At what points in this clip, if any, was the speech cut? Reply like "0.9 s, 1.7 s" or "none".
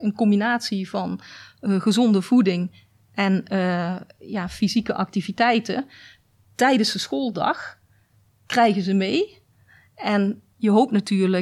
none